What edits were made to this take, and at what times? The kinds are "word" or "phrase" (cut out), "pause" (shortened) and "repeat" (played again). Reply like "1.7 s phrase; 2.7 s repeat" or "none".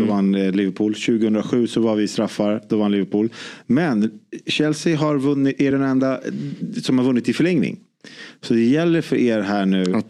none